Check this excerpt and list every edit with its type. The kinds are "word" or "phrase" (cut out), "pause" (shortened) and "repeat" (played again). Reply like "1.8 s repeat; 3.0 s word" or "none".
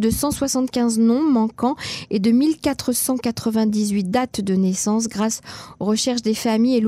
none